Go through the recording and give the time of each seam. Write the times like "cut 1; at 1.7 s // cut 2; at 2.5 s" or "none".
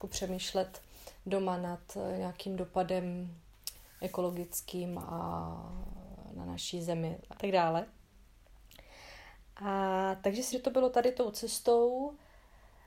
cut 1; at 7.3 s // cut 2; at 10.5 s